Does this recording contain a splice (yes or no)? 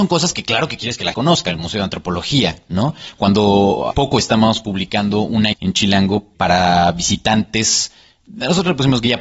yes